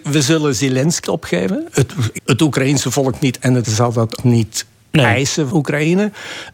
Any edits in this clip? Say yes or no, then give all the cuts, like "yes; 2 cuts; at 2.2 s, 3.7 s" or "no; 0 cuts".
yes; 5 cuts; at 1.0 s, 2.2 s, 3.6 s, 4.2 s, 5.5 s